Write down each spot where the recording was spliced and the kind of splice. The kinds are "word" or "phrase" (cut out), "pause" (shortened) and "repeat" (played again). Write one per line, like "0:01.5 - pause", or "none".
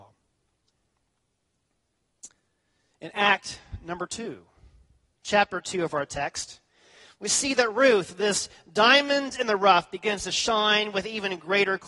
none